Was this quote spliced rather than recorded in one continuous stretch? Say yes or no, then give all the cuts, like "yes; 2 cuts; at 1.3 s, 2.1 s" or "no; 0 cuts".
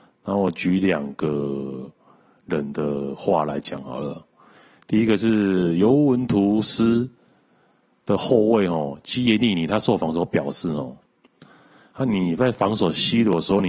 no; 0 cuts